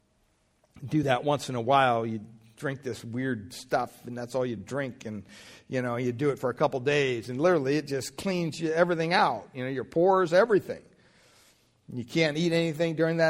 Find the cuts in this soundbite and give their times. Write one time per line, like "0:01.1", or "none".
none